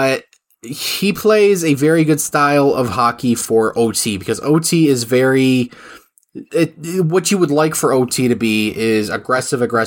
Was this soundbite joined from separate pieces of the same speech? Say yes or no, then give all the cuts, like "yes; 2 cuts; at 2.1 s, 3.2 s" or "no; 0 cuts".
no; 0 cuts